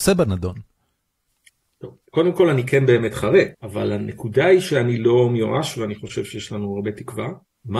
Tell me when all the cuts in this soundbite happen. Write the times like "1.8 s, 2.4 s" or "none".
2.0 s, 3.5 s